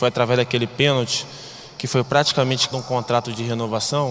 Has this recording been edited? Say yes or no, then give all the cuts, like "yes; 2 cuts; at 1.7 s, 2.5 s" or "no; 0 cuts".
yes; 1 cut; at 2.7 s